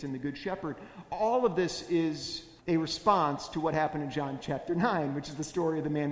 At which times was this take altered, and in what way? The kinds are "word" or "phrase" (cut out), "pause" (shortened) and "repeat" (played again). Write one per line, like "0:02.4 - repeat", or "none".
0:02.6 - pause